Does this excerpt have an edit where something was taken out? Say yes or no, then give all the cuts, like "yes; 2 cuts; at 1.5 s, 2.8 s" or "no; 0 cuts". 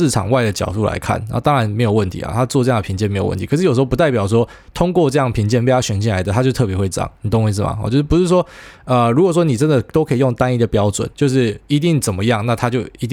yes; 1 cut; at 11.1 s